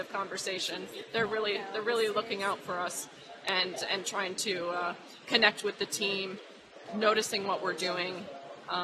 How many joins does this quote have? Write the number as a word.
zero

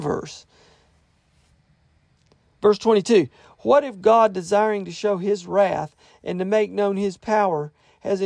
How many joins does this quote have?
zero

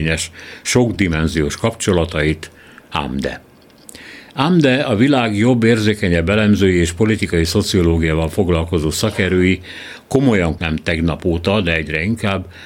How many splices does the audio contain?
one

